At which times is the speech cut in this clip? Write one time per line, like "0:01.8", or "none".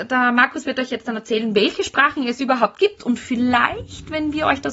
none